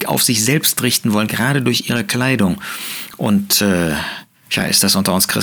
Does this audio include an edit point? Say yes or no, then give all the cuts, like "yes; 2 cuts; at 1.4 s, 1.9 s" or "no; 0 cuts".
yes; 1 cut; at 4.3 s